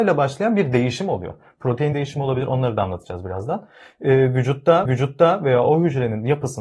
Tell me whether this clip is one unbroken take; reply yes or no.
no